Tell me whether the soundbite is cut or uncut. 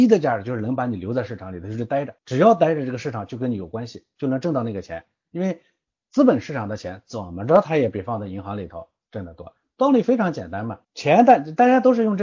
cut